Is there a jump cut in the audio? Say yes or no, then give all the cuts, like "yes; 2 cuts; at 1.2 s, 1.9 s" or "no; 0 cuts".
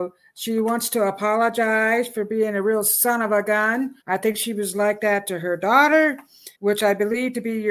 yes; 2 cuts; at 4.0 s, 6.5 s